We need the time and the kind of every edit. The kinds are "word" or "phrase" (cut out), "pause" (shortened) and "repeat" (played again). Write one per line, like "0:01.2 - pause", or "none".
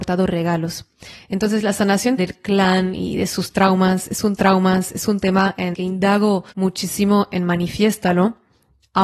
0:02.2 - word
0:04.4 - repeat
0:05.7 - word
0:06.5 - pause